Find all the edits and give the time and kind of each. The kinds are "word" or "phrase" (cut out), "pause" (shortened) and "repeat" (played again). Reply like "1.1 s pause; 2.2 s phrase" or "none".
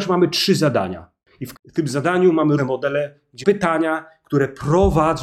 1.5 s word; 2.6 s word; 3.4 s word

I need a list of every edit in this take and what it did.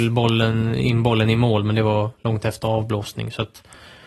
none

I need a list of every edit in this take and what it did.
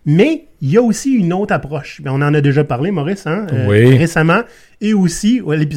none

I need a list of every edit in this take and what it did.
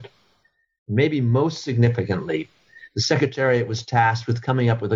none

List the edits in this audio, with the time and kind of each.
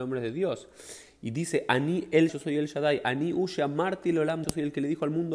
2.3 s word; 4.4 s phrase

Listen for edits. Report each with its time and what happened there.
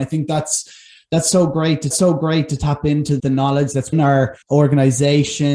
1.9 s repeat; 3.2 s word; 3.9 s word; 4.4 s pause

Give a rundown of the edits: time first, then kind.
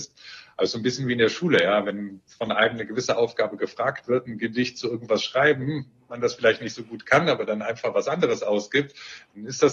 none

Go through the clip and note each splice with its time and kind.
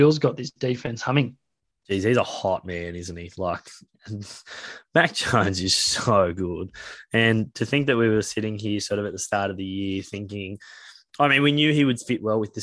none

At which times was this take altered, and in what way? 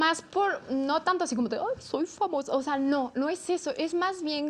none

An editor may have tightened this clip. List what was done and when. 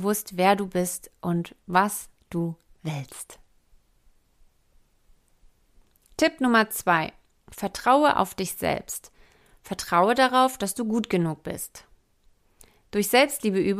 none

